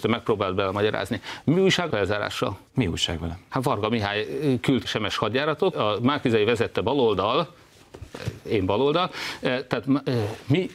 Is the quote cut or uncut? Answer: cut